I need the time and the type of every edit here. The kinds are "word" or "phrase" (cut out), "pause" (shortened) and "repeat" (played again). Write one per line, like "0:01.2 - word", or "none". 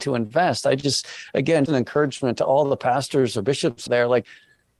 0:01.7 - word
0:03.9 - word